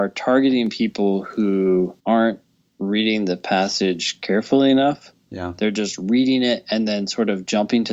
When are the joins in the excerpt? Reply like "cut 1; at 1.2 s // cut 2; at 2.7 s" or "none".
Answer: cut 1; at 2.0 s